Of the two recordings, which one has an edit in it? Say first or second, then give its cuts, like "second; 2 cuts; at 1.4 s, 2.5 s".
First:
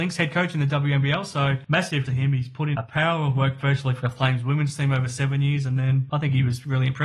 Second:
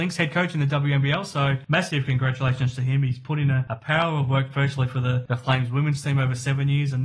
first; 3 cuts; at 2.1 s, 2.7 s, 4.0 s